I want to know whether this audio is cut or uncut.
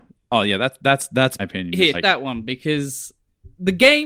cut